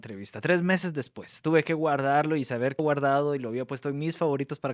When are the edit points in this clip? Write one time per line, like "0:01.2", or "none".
0:02.8